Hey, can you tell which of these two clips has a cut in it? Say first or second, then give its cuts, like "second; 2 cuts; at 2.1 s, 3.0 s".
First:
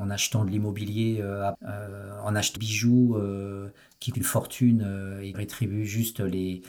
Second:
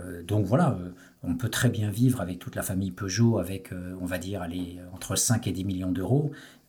first; 4 cuts; at 1.5 s, 2.6 s, 4.1 s, 5.3 s